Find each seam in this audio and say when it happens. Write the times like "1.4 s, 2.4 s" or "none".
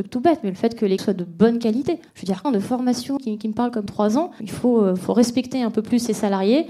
1.0 s, 2.1 s, 2.4 s, 3.2 s, 3.9 s, 4.4 s